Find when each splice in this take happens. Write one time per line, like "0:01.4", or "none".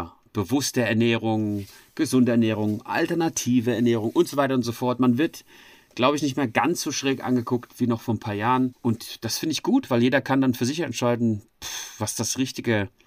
none